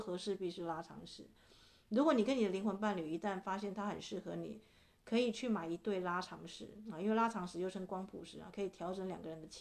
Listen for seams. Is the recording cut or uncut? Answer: uncut